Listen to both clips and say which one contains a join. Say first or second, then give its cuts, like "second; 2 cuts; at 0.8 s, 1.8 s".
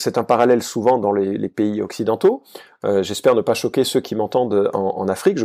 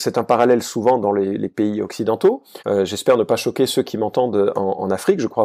second; 1 cut; at 2.6 s